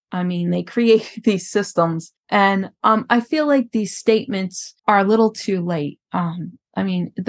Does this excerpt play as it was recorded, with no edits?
no; 3 cuts; at 2.2 s, 4.8 s, 6.0 s

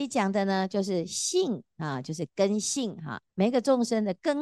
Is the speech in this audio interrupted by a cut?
yes; 1 cut; at 3.3 s

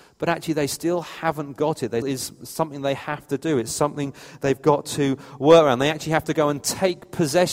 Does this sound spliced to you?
yes; 1 cut; at 2.0 s

